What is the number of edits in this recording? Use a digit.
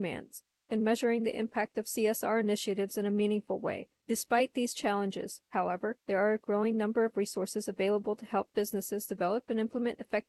0